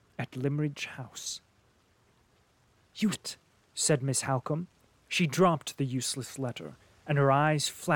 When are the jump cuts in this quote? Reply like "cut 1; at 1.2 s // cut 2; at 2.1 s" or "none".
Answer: cut 1; at 3.1 s